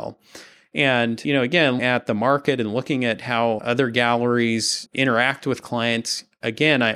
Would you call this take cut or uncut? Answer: cut